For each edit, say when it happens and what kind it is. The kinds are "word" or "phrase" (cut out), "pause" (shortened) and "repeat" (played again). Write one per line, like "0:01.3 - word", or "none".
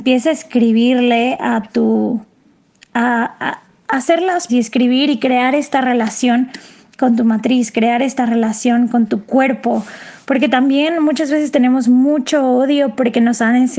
0:04.5 - word